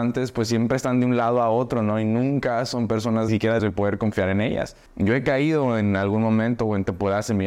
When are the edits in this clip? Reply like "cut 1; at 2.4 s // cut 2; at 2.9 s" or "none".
cut 1; at 3.3 s // cut 2; at 3.6 s // cut 3; at 4.9 s